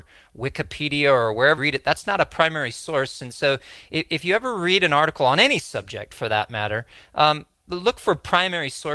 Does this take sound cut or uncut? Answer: cut